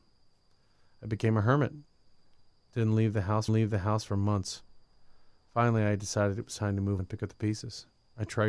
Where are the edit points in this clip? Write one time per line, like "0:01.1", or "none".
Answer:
0:03.5
0:07.0